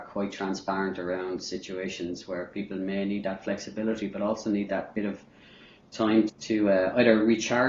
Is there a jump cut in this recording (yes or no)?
yes